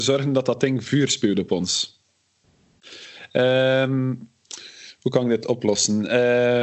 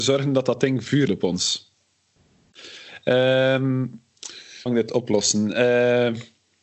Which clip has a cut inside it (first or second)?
second